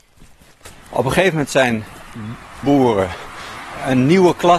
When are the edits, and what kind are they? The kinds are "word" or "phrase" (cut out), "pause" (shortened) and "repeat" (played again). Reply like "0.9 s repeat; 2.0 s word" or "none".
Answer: 2.6 s phrase